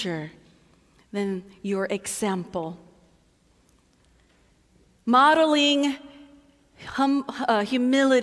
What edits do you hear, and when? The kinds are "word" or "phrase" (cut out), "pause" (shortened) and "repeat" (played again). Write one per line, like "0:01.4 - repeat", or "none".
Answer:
none